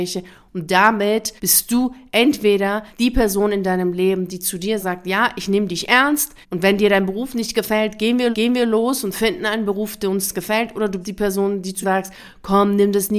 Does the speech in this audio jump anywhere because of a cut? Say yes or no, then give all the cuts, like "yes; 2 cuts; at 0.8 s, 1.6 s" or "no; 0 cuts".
yes; 7 cuts; at 1.4 s, 2.9 s, 4.8 s, 6.4 s, 8.3 s, 11.0 s, 11.8 s